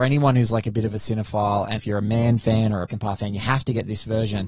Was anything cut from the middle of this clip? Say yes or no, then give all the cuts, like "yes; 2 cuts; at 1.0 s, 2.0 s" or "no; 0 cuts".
yes; 2 cuts; at 1.8 s, 2.9 s